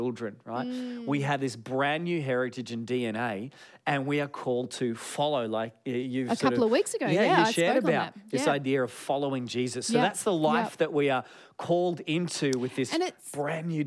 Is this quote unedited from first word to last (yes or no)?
yes